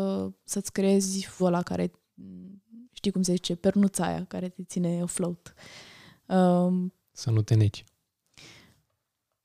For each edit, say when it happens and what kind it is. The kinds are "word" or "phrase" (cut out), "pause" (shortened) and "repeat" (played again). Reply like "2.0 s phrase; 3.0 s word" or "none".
1.4 s word; 2.8 s pause